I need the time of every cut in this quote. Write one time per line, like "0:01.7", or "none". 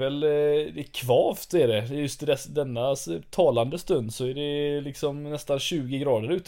none